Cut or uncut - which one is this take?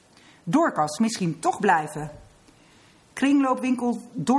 cut